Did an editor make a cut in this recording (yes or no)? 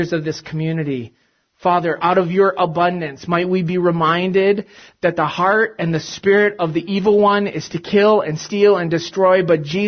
no